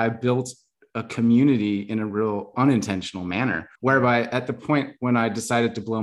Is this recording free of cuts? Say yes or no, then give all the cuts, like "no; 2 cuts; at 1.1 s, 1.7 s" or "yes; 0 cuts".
no; 2 cuts; at 2.5 s, 3.8 s